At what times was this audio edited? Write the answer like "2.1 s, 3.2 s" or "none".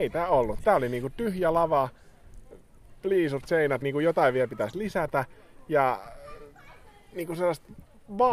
3.8 s